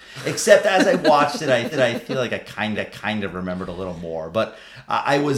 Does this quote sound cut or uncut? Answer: cut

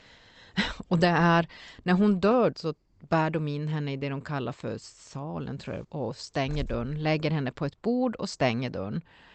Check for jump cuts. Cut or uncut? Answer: cut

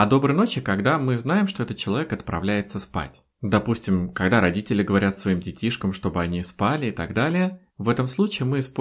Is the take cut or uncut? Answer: cut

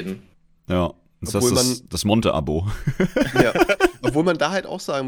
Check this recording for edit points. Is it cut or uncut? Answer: uncut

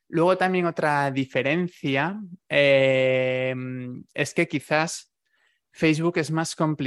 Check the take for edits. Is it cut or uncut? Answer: uncut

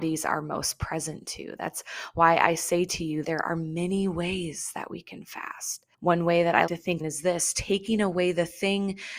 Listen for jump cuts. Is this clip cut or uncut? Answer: cut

